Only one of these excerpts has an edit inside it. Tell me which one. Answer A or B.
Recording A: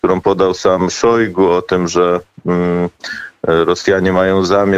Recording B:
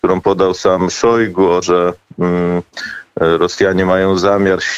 B